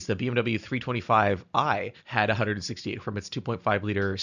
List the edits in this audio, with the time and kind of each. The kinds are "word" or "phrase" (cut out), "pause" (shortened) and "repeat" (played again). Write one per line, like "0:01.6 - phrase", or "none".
0:02.0 - pause
0:03.0 - word

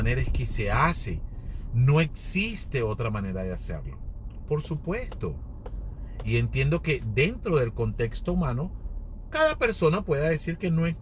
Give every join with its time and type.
none

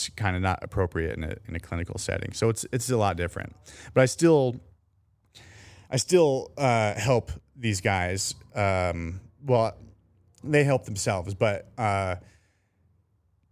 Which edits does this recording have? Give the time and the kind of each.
none

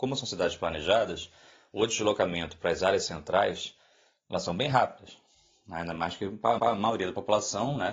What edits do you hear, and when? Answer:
0:06.6 - repeat

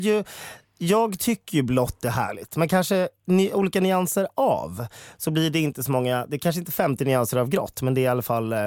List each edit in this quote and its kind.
none

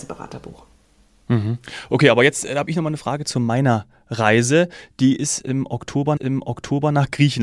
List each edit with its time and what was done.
0:06.2 - repeat

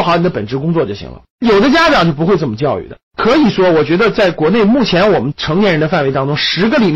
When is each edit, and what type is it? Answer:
0:01.3 - pause
0:03.0 - pause

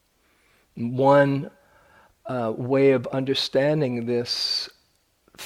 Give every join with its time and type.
none

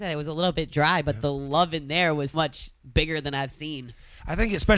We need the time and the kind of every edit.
0:02.3 - word

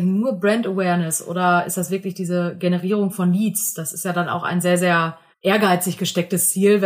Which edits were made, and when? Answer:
0:05.3 - pause

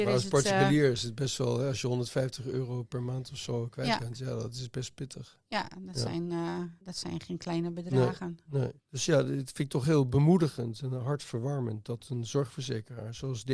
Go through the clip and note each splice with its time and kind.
0:06.8 - pause
0:08.8 - pause

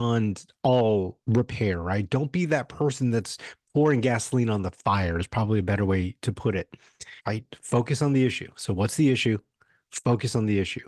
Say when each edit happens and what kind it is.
0:01.2 - pause
0:07.2 - pause

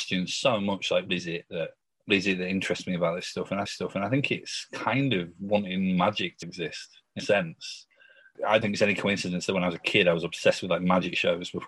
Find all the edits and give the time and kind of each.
0:01.1 - word
0:02.1 - phrase
0:03.7 - repeat
0:06.4 - word
0:07.2 - word
0:08.6 - word

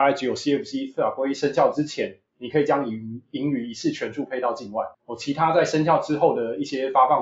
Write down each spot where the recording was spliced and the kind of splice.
0:04.9 - pause

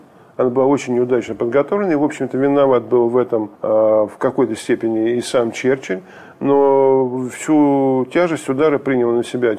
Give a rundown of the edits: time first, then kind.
0:03.5 - pause

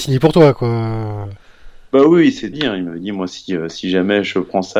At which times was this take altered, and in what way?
0:02.5 - phrase

